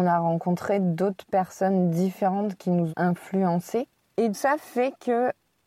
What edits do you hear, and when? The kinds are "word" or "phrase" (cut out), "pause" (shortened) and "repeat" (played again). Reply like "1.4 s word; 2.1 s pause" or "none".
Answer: 2.9 s word; 4.3 s word